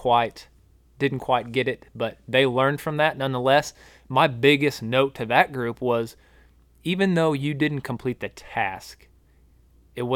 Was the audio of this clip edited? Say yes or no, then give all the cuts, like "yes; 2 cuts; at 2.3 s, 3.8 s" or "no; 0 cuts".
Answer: no; 0 cuts